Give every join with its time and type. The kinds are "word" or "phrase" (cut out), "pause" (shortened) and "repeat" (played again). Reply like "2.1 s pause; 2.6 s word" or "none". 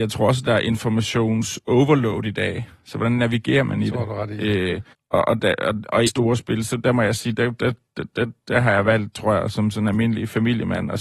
4.9 s pause; 6.1 s phrase